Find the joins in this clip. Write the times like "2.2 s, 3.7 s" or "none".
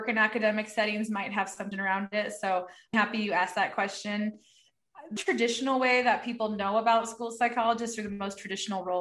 1.7 s, 2.9 s, 5.2 s